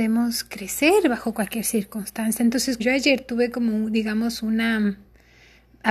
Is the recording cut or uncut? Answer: cut